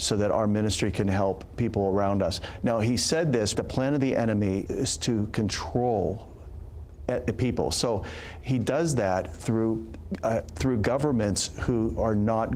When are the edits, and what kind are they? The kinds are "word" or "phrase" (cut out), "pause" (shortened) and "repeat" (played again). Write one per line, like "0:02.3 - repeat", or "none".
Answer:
0:03.5 - phrase
0:04.7 - word